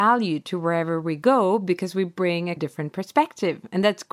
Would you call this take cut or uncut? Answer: cut